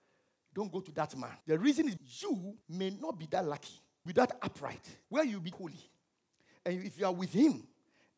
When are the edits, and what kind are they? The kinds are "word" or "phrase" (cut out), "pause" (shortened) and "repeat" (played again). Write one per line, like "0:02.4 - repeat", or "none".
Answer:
0:01.4 - pause
0:02.0 - word
0:02.6 - pause
0:04.1 - phrase
0:05.0 - pause
0:05.5 - word